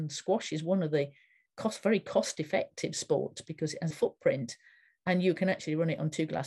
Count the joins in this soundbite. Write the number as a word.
one